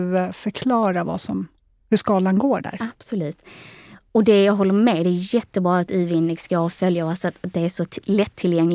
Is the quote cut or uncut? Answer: uncut